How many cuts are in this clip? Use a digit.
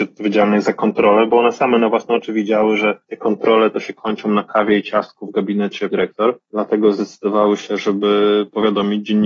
3